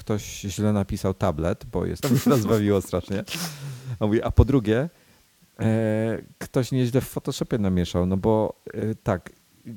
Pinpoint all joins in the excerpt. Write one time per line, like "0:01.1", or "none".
0:02.0